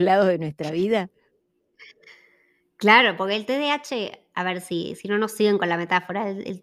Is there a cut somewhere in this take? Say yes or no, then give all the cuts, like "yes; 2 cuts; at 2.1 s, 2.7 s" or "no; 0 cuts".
no; 0 cuts